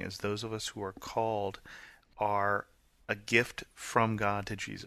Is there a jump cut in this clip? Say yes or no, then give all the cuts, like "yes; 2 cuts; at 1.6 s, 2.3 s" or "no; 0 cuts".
no; 0 cuts